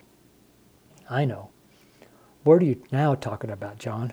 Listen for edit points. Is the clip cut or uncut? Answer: uncut